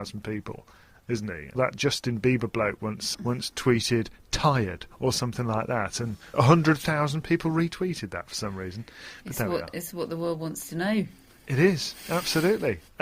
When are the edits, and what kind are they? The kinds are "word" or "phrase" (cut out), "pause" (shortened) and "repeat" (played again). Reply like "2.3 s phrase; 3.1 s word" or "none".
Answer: 1.6 s phrase; 3.1 s word; 6.3 s word

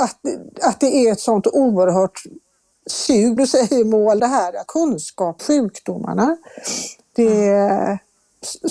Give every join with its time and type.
3.4 s word; 4.2 s word; 4.7 s word; 5.4 s word

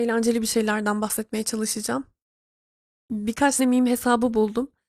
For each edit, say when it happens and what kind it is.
3.6 s word

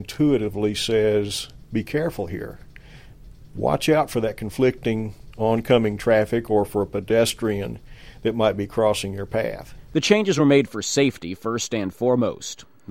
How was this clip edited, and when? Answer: none

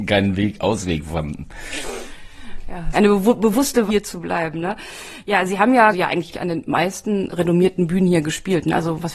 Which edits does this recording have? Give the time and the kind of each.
2.9 s word; 3.9 s word; 5.9 s word; 6.3 s word; 7.3 s word

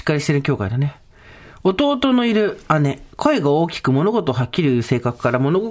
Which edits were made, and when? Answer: none

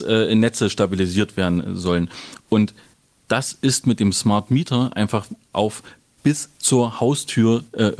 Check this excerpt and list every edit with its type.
none

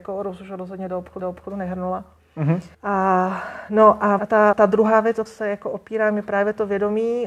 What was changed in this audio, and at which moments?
1.2 s repeat; 2.7 s pause; 4.2 s word; 4.5 s word; 5.3 s word

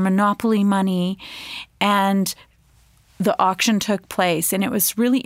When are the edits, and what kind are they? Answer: none

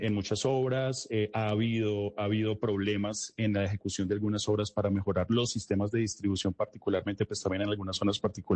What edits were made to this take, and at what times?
none

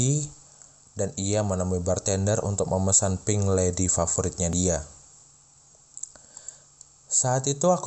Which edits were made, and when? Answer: none

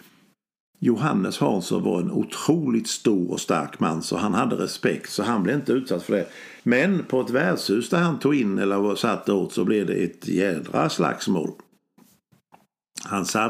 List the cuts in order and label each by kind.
6.6 s pause

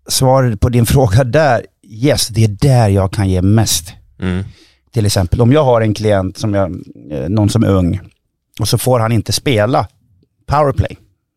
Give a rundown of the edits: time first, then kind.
none

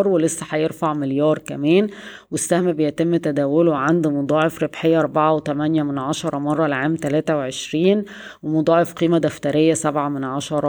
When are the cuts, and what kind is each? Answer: none

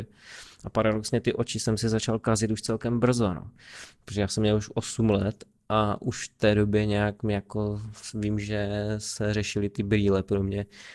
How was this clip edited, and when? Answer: none

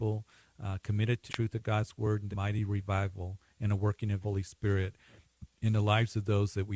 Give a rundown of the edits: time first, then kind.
1.3 s word; 2.3 s phrase; 4.2 s word; 5.5 s pause

